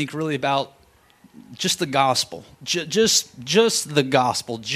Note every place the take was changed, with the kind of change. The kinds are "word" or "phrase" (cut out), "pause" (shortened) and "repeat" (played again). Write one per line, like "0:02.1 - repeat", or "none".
0:02.5 - pause